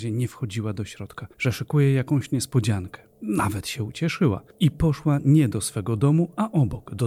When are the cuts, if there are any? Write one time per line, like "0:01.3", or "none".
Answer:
0:01.3
0:03.1
0:04.5

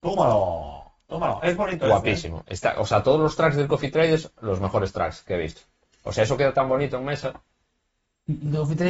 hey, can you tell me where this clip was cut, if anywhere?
none

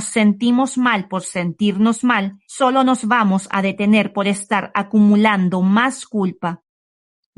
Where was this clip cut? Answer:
0:02.4

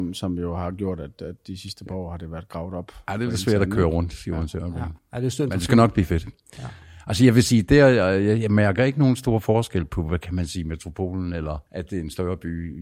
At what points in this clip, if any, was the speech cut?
0:05.0
0:11.7

